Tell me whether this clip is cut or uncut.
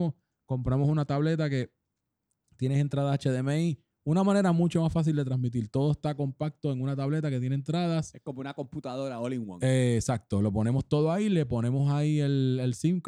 uncut